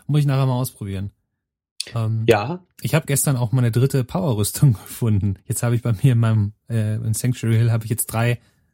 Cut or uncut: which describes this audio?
cut